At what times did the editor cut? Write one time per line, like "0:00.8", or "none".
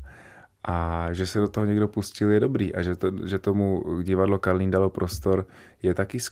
none